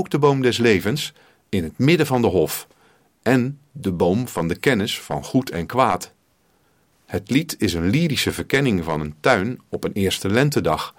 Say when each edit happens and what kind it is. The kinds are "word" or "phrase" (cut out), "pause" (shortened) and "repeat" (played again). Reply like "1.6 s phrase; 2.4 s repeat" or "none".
none